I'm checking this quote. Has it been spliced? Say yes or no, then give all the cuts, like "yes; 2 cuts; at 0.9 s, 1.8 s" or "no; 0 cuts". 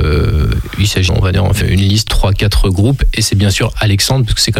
yes; 3 cuts; at 1.1 s, 1.6 s, 2.1 s